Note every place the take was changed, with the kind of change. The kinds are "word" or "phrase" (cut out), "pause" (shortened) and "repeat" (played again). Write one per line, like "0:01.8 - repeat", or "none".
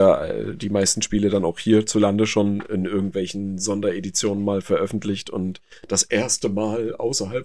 none